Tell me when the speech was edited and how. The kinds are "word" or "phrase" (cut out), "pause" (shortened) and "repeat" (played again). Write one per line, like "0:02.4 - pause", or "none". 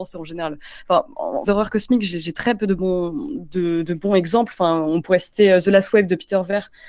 0:01.5 - phrase